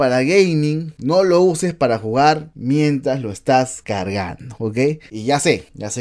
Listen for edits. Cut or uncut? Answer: uncut